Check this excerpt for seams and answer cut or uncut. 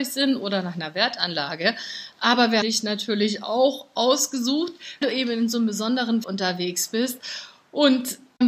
cut